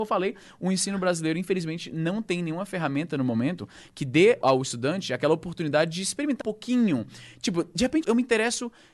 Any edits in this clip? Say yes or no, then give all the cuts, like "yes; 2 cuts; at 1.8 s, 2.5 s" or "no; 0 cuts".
yes; 3 cuts; at 4.4 s, 6.4 s, 8.0 s